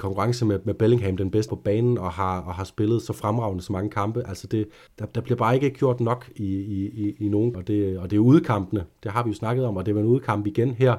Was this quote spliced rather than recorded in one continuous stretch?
yes; 3 cuts; at 1.5 s, 4.9 s, 7.5 s

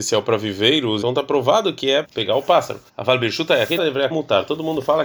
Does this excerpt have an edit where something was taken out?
yes; 5 cuts; at 1.0 s, 2.0 s, 2.9 s, 3.8 s, 4.1 s

